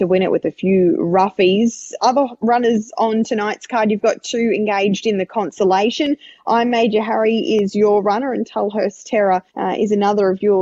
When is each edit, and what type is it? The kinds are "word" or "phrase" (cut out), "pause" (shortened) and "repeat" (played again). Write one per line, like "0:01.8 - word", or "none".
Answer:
0:09.5 - pause